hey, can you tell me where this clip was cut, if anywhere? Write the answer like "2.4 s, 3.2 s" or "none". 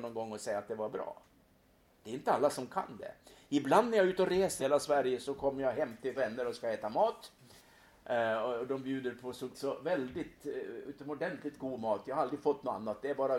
4.6 s, 6.2 s, 9.5 s